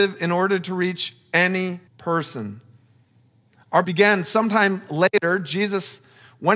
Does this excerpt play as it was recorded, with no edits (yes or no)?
no